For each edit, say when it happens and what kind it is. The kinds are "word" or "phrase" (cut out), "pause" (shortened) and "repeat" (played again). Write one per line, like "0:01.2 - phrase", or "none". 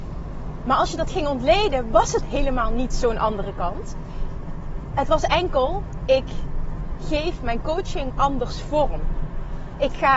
none